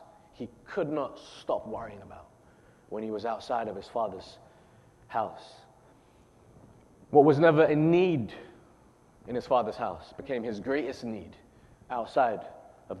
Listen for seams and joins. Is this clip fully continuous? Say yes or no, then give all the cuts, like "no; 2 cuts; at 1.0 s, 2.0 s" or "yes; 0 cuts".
yes; 0 cuts